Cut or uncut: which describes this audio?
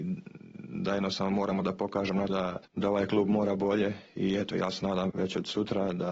cut